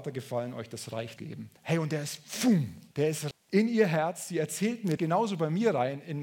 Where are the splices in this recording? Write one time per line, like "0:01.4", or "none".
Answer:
0:01.2
0:01.6
0:02.9
0:03.3
0:05.0